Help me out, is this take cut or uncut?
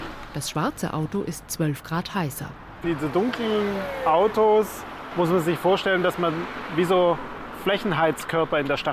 cut